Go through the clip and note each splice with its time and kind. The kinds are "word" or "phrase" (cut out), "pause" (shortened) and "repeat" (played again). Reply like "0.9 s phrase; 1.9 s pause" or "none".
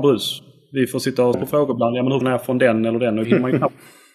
1.3 s word; 2.2 s word; 3.2 s word